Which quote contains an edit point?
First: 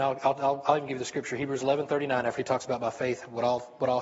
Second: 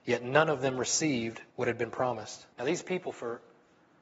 second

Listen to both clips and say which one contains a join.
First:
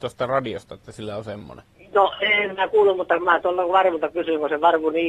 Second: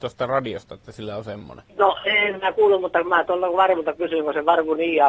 second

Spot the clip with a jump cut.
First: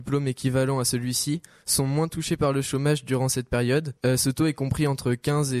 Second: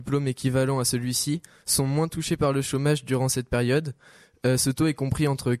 first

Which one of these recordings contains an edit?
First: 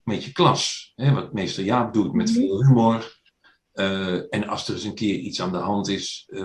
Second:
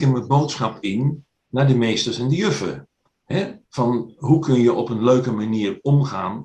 second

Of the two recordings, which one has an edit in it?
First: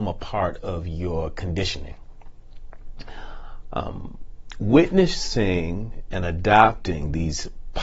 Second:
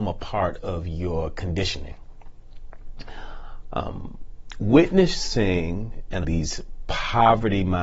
second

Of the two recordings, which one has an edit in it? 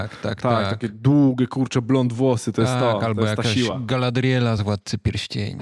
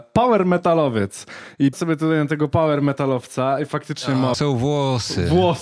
second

